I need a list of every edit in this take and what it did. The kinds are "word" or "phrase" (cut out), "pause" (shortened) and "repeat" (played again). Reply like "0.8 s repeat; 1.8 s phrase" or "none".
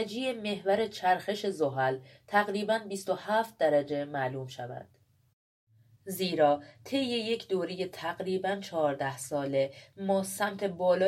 none

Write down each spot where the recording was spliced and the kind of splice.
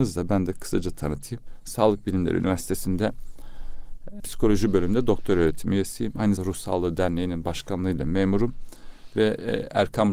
4.2 s word; 6.4 s word

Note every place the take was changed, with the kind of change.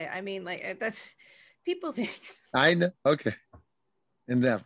1.9 s phrase

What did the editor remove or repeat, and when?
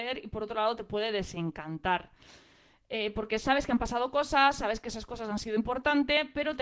none

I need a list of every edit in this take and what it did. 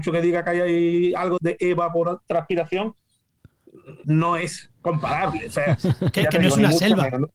1.4 s word; 4.0 s word

